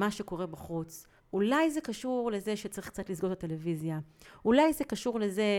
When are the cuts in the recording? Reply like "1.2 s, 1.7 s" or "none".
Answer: 1.2 s